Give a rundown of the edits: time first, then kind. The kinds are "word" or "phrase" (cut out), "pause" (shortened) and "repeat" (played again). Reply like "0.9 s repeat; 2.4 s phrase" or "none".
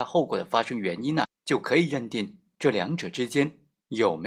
1.2 s word